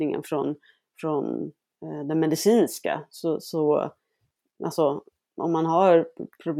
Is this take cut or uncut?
uncut